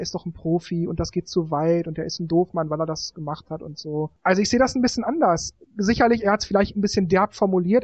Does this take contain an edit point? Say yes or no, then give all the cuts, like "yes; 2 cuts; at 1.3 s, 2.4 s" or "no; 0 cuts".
yes; 1 cut; at 4.2 s